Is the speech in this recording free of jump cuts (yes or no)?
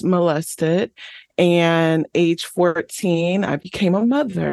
yes